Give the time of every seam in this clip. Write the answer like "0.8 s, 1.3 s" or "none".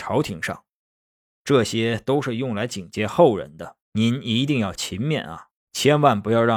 3.8 s, 5.6 s